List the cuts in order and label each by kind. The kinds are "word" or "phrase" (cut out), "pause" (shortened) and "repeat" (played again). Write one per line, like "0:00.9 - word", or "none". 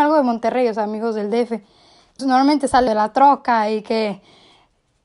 0:02.2 - word
0:02.9 - word